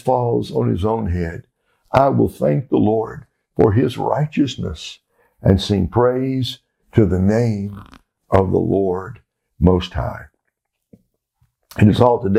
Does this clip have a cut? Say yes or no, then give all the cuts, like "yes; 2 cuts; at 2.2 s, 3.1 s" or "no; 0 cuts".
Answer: no; 0 cuts